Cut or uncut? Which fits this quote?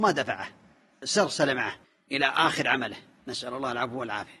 uncut